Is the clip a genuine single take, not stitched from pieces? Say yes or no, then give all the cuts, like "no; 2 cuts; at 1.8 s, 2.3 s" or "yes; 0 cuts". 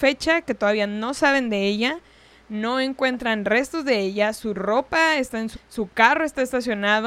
no; 1 cut; at 5.5 s